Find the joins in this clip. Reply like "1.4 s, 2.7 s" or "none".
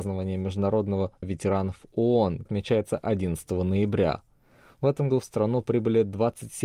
1.2 s, 2.5 s, 5.1 s